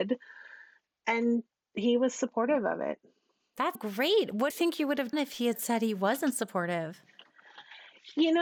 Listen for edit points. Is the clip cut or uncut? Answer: cut